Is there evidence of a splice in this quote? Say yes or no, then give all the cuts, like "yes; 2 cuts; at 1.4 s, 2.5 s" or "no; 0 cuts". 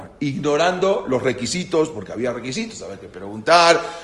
no; 0 cuts